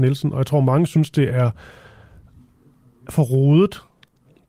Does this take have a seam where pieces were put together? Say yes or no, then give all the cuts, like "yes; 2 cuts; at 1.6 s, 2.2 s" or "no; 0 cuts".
no; 0 cuts